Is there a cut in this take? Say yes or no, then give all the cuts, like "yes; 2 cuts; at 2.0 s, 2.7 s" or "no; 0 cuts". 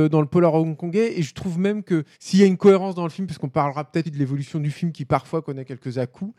yes; 2 cuts; at 2.1 s, 4.0 s